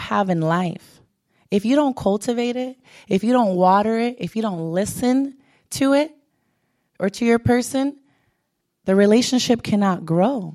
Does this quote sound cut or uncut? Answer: uncut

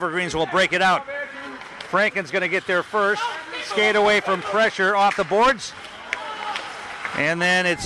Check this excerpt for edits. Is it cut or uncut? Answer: uncut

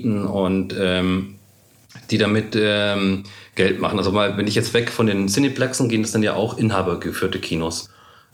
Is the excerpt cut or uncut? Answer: uncut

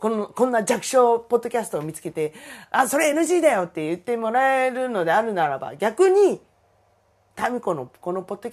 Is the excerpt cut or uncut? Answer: uncut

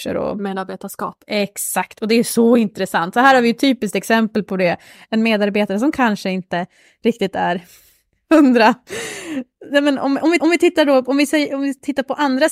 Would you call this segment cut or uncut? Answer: cut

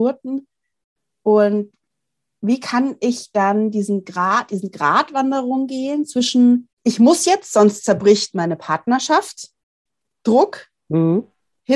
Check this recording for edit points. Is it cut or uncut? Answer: cut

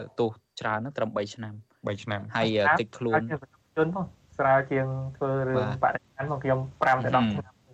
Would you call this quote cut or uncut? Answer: uncut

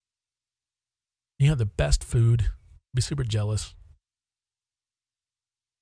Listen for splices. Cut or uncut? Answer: uncut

